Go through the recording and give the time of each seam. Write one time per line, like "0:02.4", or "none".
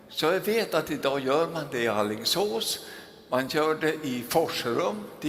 none